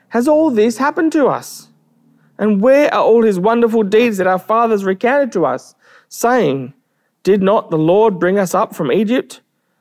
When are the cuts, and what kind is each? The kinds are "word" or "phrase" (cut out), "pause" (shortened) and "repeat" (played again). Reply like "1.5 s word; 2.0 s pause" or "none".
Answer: none